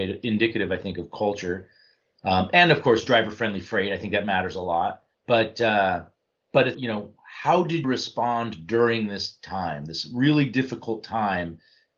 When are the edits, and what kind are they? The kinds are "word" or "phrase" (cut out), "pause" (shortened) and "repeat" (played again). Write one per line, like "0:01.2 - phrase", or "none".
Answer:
0:05.1 - pause
0:06.2 - pause
0:06.7 - word
0:07.8 - word